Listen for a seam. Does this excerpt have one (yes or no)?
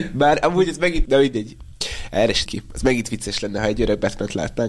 yes